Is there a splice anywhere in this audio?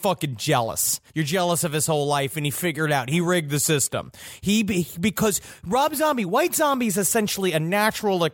yes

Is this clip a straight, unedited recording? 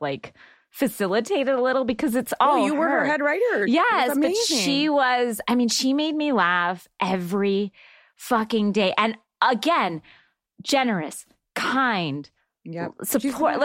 yes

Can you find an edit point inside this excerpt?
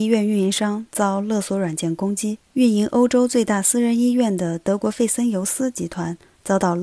yes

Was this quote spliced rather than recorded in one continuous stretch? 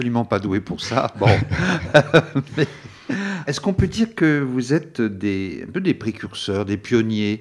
yes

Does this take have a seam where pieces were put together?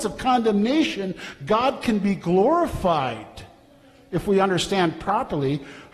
no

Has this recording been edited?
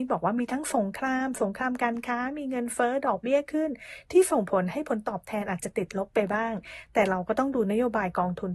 no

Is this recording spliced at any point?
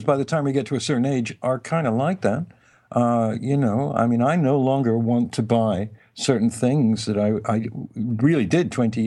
no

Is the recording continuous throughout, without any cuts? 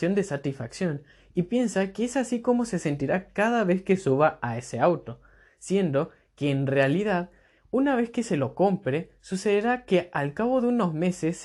yes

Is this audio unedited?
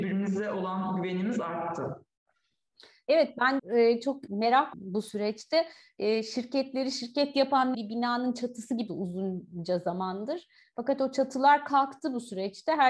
no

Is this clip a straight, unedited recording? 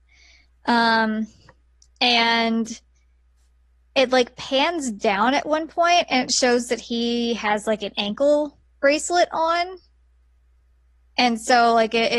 yes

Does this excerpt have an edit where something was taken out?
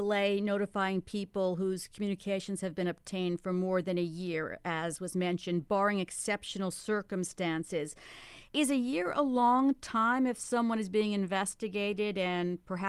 yes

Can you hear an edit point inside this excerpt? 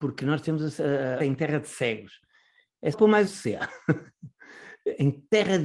yes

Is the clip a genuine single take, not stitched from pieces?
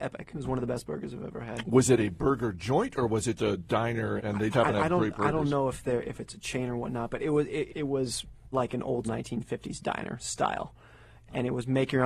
no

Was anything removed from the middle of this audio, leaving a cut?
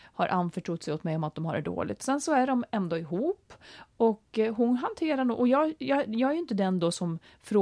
no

